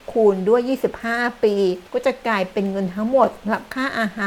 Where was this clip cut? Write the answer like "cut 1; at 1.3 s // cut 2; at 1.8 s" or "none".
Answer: cut 1; at 1.9 s